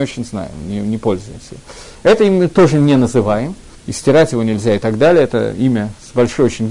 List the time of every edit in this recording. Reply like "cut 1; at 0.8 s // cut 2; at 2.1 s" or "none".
cut 1; at 3.7 s